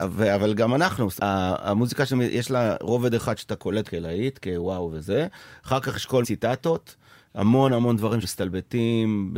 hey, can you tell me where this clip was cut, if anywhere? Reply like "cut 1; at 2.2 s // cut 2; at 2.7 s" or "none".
cut 1; at 1.2 s // cut 2; at 3.8 s // cut 3; at 6.2 s // cut 4; at 8.2 s